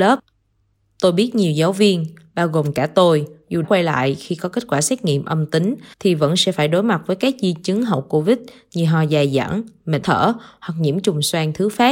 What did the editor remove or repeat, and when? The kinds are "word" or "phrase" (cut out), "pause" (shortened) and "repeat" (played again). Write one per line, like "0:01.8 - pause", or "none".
0:03.6 - word
0:05.9 - pause
0:10.0 - phrase